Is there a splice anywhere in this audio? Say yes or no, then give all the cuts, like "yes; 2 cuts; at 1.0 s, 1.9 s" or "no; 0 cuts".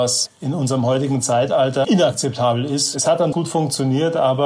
yes; 2 cuts; at 1.8 s, 3.3 s